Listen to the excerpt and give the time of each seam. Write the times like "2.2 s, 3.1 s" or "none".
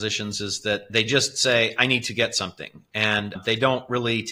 none